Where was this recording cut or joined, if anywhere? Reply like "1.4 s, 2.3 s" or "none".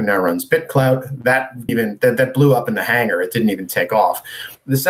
1.7 s